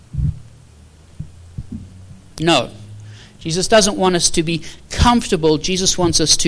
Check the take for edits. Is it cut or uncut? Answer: uncut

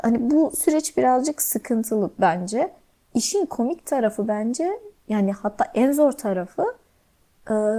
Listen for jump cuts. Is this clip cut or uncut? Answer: uncut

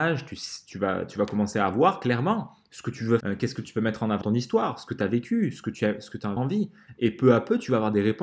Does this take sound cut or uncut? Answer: cut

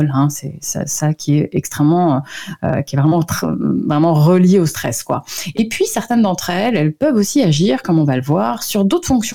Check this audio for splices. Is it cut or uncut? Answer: uncut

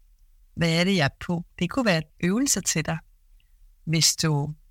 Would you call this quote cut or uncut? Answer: cut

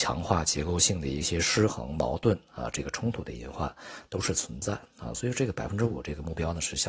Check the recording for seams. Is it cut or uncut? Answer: uncut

